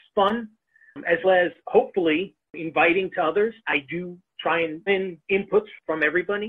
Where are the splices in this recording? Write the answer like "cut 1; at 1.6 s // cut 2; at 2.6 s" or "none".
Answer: cut 1; at 1.2 s // cut 2; at 3.6 s // cut 3; at 4.9 s